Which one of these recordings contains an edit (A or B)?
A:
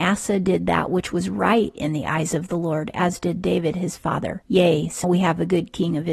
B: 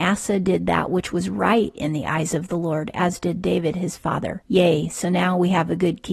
A